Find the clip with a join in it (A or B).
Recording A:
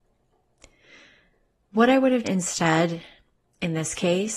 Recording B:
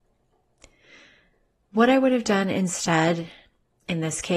A